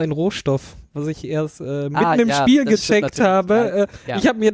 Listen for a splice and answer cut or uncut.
uncut